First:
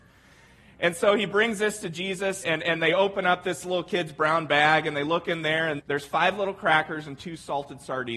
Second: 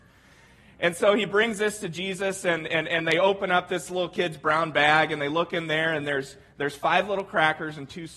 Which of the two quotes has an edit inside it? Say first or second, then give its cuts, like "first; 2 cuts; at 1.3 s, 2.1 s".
first; 2 cuts; at 2.4 s, 5.8 s